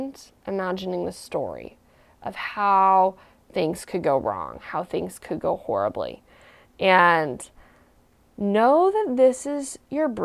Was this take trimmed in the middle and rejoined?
no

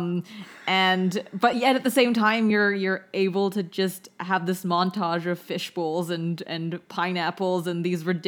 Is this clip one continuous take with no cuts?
yes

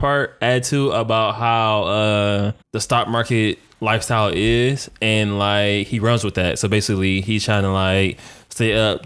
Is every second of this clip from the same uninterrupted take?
no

